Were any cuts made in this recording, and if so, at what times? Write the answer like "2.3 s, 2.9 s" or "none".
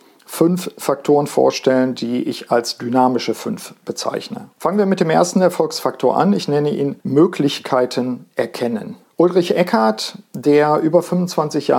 4.6 s, 7.0 s, 9.0 s